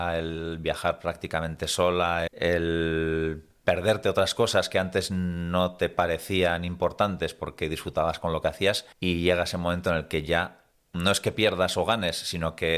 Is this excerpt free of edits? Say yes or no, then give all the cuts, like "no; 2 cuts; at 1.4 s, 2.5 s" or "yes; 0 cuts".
no; 3 cuts; at 2.3 s, 8.9 s, 10.7 s